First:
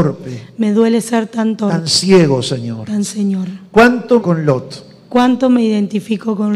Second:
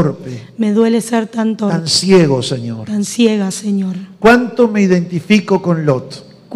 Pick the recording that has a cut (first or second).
first